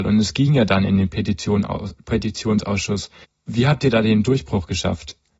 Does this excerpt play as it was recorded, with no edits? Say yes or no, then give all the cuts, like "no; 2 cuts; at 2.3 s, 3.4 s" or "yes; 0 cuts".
no; 1 cut; at 3.2 s